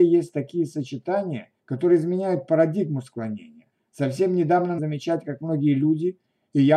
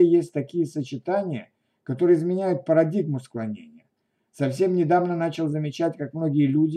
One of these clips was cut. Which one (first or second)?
first